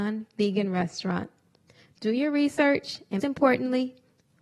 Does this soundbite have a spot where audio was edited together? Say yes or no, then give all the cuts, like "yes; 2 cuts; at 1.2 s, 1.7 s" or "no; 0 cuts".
yes; 1 cut; at 3.2 s